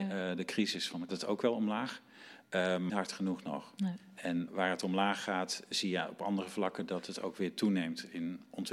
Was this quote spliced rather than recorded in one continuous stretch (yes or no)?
yes